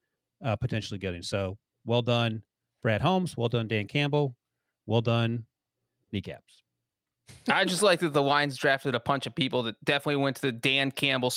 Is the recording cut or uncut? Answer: uncut